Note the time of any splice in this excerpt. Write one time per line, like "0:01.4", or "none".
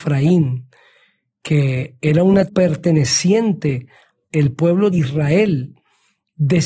0:02.5
0:04.2
0:04.9